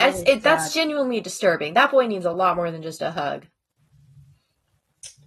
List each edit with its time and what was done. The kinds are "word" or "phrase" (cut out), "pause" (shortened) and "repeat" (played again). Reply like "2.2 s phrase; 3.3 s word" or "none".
none